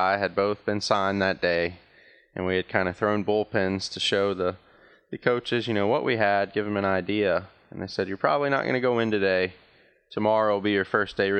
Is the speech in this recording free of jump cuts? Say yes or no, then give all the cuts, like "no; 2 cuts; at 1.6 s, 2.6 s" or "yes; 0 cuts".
yes; 0 cuts